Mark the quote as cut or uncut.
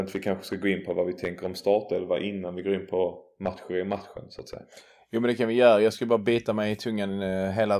uncut